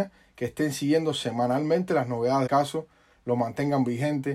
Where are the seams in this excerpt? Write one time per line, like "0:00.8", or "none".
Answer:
0:02.5